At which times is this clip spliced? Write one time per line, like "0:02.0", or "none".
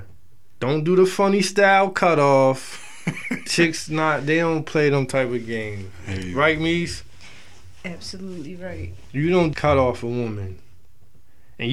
0:03.5
0:09.5